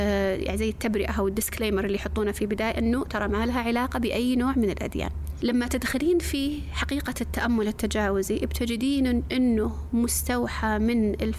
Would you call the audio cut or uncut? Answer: uncut